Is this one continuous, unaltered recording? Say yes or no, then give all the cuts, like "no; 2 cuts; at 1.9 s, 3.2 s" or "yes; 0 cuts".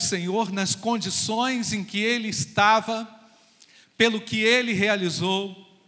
yes; 0 cuts